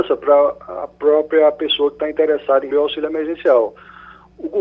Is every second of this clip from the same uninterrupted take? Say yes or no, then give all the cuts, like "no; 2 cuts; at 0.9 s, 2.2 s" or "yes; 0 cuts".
no; 1 cut; at 2.7 s